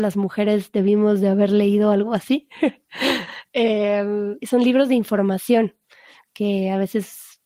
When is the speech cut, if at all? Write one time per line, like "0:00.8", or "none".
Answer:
0:04.4